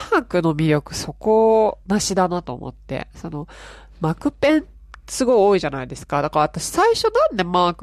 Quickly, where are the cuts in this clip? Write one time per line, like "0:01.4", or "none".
0:01.8
0:05.0

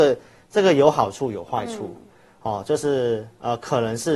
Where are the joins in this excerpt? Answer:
none

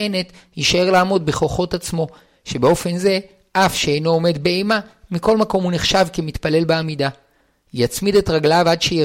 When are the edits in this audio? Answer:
none

